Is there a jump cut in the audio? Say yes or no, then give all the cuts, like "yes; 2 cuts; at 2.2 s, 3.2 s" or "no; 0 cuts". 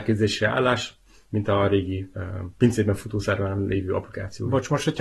no; 0 cuts